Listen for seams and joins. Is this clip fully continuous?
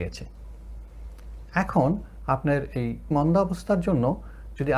no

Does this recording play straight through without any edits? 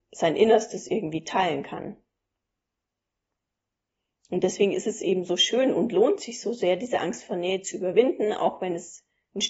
yes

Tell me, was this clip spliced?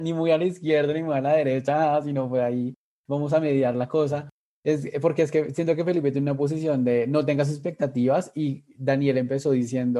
no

